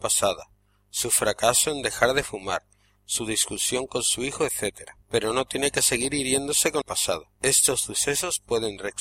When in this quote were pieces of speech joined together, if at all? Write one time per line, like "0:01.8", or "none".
0:05.0
0:06.8
0:07.4